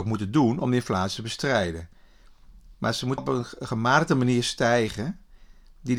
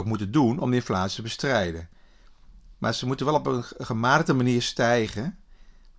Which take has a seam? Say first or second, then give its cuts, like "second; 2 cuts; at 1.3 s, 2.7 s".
first; 1 cut; at 3.2 s